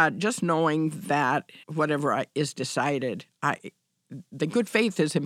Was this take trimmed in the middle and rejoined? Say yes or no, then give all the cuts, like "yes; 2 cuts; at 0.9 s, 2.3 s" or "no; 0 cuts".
yes; 1 cut; at 1.6 s